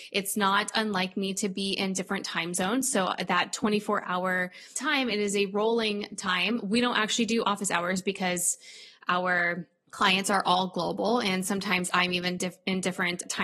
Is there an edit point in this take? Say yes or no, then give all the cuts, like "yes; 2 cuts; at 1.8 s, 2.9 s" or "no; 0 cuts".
no; 0 cuts